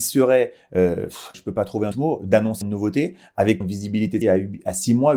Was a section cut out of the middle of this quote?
yes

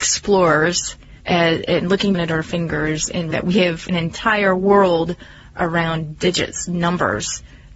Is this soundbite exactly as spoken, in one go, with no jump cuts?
no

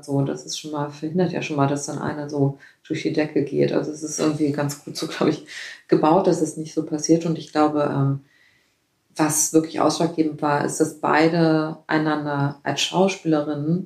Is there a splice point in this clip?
no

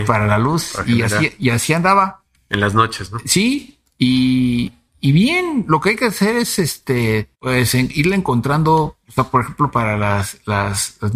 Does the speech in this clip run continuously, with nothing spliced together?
no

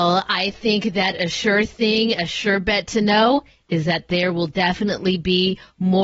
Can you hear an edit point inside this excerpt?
no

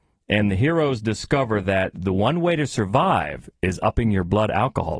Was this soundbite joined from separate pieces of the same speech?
no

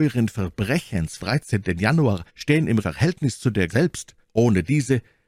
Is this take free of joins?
no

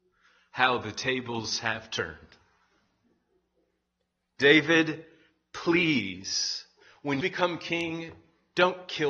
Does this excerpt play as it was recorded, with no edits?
no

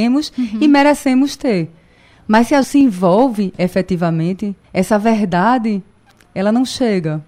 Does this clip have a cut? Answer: yes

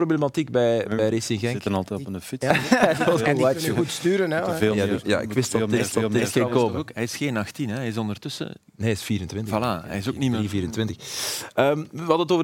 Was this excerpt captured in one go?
no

